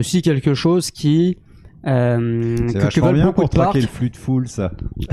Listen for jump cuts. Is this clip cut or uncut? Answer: uncut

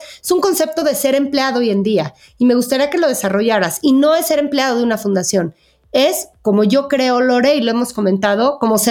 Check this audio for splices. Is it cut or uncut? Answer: uncut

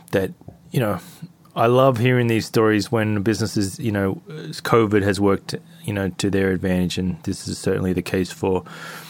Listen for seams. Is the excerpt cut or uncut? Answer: uncut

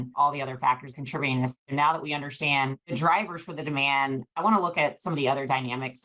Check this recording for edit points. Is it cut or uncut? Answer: uncut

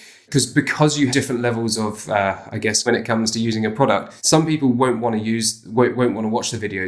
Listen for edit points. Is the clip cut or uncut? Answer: cut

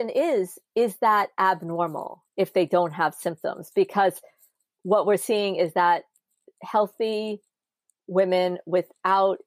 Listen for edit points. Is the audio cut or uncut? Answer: uncut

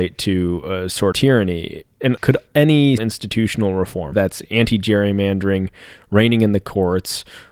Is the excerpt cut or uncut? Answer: cut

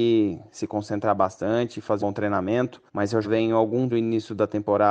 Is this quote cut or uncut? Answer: cut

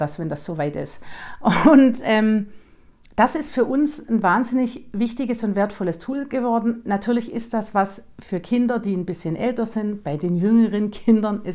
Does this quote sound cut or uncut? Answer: uncut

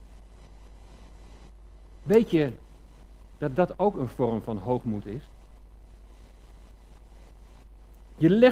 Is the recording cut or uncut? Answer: uncut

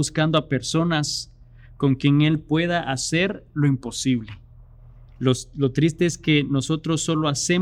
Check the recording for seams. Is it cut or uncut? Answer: uncut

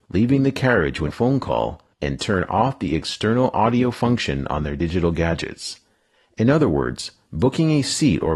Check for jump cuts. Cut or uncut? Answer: cut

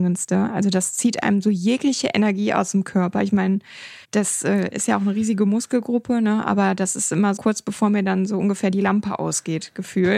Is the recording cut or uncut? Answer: cut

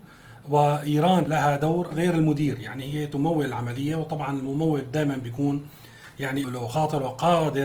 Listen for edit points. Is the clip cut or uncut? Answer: cut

